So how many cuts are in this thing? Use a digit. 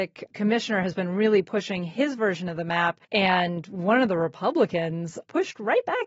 1